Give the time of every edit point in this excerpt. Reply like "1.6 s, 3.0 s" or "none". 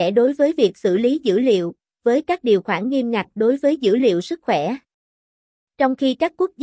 none

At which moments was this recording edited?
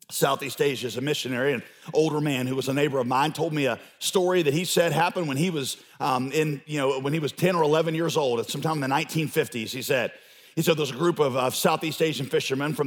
none

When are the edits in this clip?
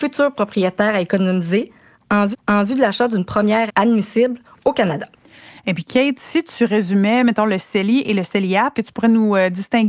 2.3 s, 3.7 s, 8.7 s

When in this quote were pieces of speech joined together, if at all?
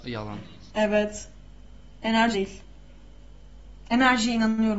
2.3 s

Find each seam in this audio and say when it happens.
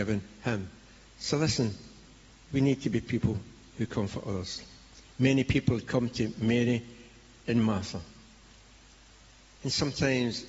none

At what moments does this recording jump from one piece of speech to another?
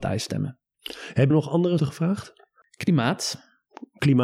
1.3 s, 1.8 s

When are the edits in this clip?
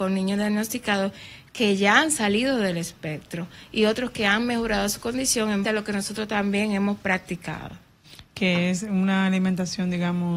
5.6 s

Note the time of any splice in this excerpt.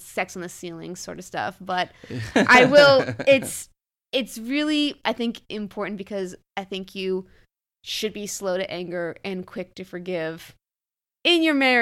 none

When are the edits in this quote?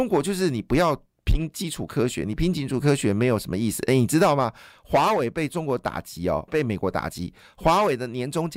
6.5 s

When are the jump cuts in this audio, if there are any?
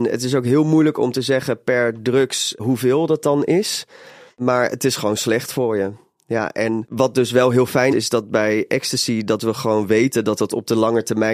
2.6 s, 7.9 s

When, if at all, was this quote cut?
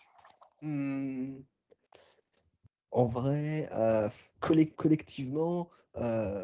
4.3 s, 4.8 s

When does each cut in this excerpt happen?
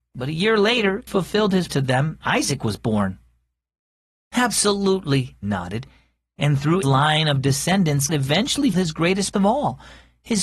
1.1 s, 1.7 s, 2.2 s, 5.4 s, 6.8 s, 8.1 s, 8.7 s, 9.3 s

